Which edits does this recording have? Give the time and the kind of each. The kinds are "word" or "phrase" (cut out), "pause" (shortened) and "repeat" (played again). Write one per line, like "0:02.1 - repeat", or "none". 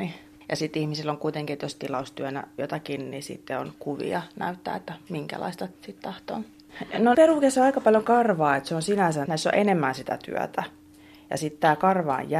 0:02.6 - word
0:05.8 - pause
0:07.1 - word
0:09.3 - word